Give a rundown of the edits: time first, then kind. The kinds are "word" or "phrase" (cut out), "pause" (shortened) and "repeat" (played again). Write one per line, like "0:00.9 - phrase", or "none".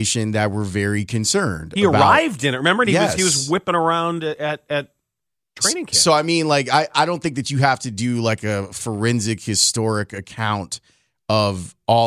none